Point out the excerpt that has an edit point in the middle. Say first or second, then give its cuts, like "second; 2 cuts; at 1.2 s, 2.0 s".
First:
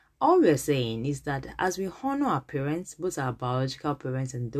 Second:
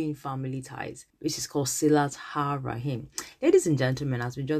second; 1 cut; at 1.1 s